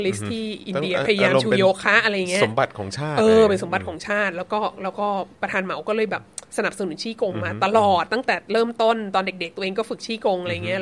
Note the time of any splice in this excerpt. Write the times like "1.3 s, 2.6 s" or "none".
5.3 s, 6.5 s